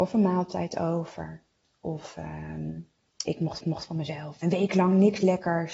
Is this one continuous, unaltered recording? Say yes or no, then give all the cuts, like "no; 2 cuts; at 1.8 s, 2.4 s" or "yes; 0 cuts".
no; 3 cuts; at 3.3 s, 3.6 s, 4.4 s